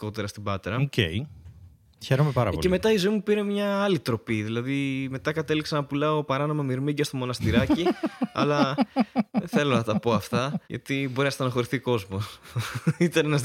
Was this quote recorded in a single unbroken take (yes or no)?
no